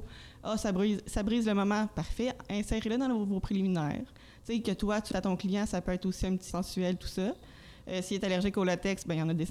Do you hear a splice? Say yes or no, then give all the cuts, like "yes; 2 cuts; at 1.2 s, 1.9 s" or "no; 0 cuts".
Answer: yes; 2 cuts; at 5.1 s, 6.5 s